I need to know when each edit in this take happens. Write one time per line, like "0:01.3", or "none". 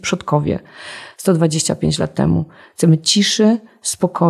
none